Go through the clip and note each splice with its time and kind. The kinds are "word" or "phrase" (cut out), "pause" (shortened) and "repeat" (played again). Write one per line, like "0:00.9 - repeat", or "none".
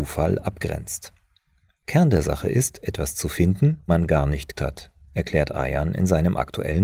0:03.9 - word
0:04.5 - word